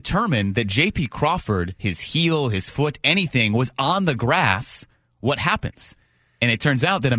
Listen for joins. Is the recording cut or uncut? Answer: uncut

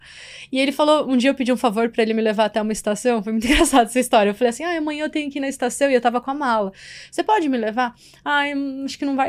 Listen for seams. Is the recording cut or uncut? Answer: uncut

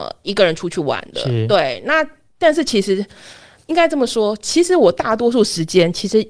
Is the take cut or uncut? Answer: uncut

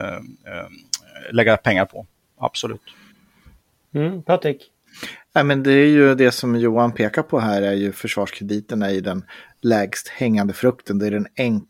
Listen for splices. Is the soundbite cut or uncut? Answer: uncut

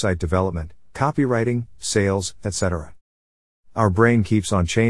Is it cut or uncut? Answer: uncut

